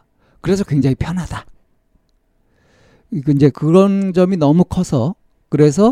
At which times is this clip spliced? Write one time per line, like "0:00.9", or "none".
0:03.5